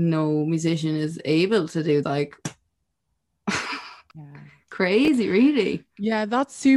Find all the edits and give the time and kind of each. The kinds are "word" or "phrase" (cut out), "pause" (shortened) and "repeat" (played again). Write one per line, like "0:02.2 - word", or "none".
0:02.0 - phrase